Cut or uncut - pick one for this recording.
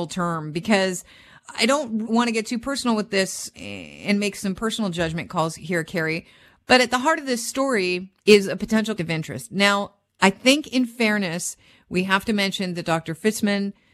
cut